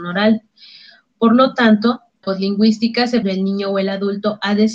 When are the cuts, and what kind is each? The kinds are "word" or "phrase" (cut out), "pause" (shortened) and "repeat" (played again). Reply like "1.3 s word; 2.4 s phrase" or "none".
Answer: 2.2 s word; 3.2 s phrase